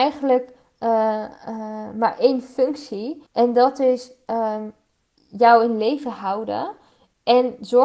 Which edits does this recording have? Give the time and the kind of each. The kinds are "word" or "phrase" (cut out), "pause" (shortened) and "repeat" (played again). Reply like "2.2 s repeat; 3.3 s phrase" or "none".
3.3 s pause